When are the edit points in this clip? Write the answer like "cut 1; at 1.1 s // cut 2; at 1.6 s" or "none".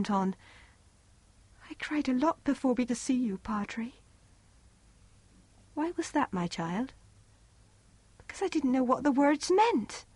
cut 1; at 2.9 s